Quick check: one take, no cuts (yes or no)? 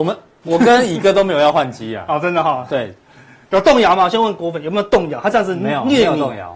yes